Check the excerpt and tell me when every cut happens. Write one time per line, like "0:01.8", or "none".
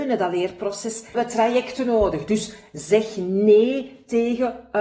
0:01.1